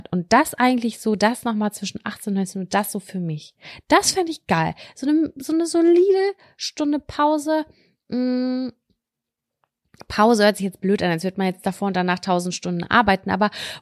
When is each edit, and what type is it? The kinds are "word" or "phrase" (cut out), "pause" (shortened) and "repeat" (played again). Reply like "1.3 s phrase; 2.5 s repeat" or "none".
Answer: none